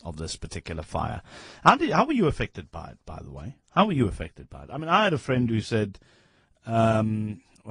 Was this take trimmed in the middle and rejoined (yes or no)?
yes